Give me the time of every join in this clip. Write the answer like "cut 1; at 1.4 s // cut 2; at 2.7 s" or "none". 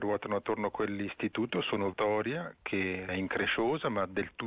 cut 1; at 1.9 s // cut 2; at 3.1 s